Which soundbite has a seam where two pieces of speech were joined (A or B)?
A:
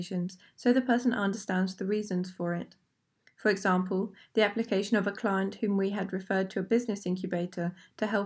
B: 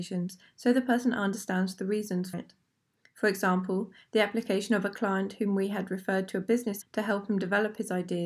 B